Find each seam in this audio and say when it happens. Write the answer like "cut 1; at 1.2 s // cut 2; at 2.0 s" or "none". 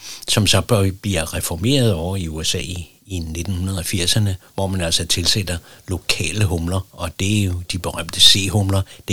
none

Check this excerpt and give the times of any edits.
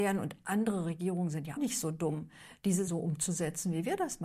cut 1; at 1.6 s // cut 2; at 2.9 s

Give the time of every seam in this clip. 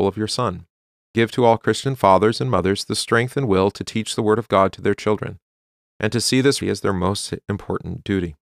cut 1; at 6.6 s

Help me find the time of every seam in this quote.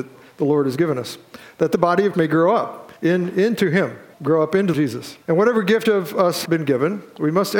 cut 1; at 2.1 s // cut 2; at 3.0 s // cut 3; at 4.1 s // cut 4; at 4.7 s // cut 5; at 5.2 s // cut 6; at 5.8 s // cut 7; at 6.4 s

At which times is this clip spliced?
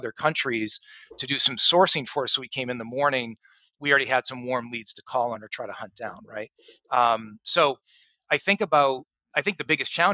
none

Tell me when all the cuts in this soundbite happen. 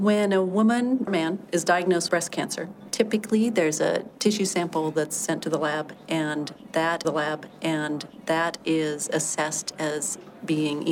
cut 1; at 1.1 s // cut 2; at 2.1 s // cut 3; at 4.1 s // cut 4; at 7.0 s

